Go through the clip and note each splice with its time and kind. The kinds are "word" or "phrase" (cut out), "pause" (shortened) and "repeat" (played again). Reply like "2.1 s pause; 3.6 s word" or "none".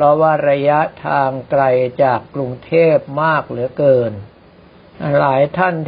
none